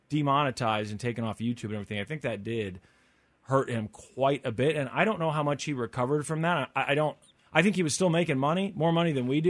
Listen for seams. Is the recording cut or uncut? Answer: uncut